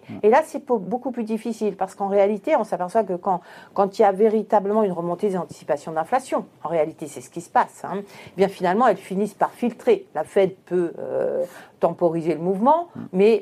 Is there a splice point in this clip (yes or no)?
no